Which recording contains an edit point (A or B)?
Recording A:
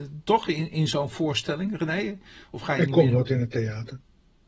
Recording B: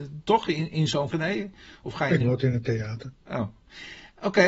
B